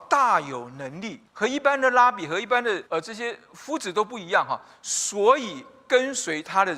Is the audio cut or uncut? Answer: cut